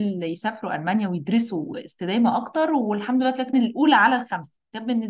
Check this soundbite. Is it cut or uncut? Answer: cut